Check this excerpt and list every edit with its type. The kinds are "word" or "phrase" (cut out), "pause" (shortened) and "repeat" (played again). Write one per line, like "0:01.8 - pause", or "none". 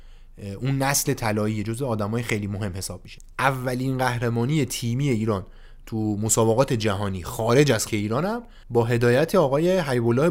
0:07.9 - word